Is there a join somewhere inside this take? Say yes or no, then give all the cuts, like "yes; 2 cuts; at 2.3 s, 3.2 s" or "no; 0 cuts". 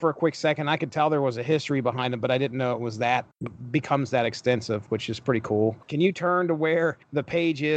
no; 0 cuts